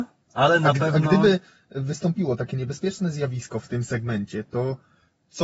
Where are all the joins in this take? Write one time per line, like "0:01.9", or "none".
none